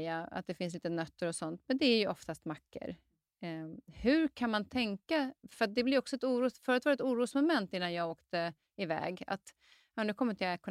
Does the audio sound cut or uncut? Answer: uncut